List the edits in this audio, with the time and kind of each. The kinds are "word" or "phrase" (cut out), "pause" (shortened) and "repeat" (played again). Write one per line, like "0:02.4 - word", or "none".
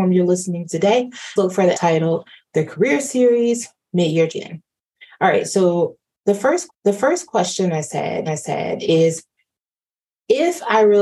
0:01.4 - phrase
0:01.7 - word
0:04.3 - word
0:06.7 - repeat
0:08.3 - repeat